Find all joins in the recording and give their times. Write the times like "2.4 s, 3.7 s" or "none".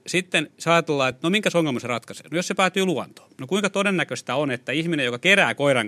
none

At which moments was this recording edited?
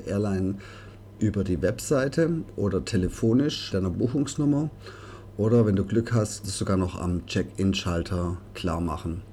3.7 s, 6.4 s

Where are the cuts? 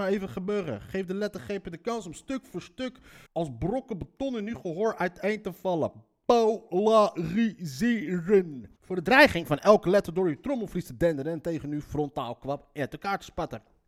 3.3 s, 8.8 s

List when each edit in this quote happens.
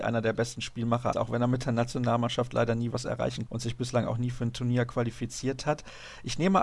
1.1 s, 2.9 s, 3.5 s

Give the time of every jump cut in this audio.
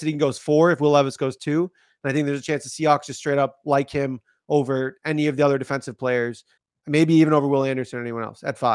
6.6 s

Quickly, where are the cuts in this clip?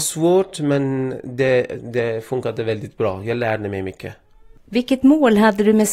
none

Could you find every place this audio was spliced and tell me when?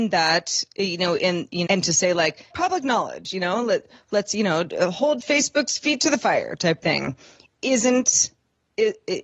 1.7 s, 2.5 s

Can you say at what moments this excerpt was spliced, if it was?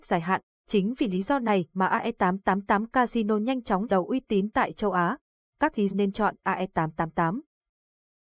3.9 s, 5.9 s

